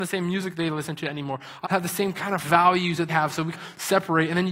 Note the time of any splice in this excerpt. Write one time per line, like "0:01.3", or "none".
0:01.6
0:02.4
0:03.1
0:03.5

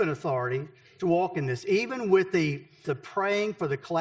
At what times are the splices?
0:02.8

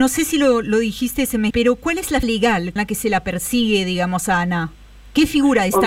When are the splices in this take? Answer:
0:01.5
0:02.2
0:02.8

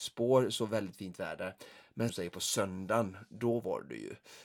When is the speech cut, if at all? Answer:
0:02.1

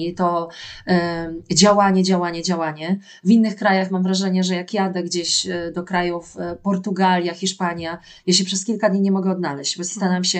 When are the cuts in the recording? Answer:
none

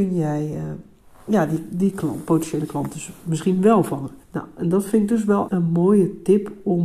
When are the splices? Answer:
0:04.2
0:05.5

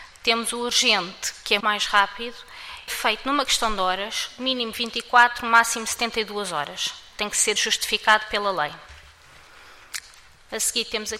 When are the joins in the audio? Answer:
0:01.6
0:02.9
0:07.6

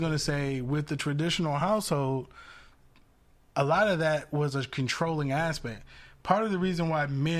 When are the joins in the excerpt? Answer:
none

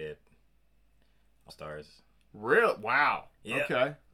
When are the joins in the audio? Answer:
0:01.5

